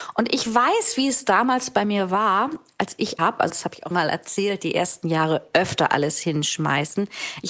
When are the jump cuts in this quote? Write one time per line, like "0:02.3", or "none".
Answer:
0:03.2
0:03.5
0:03.9